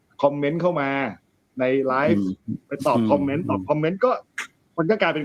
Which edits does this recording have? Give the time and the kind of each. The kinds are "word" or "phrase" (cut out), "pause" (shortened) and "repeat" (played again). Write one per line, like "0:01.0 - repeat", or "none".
none